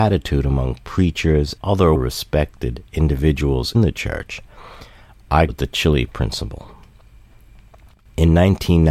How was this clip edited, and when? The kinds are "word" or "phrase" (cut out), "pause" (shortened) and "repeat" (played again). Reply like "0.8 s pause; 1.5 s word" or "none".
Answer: 1.6 s word; 1.9 s word; 3.7 s word; 5.5 s word; 6.1 s word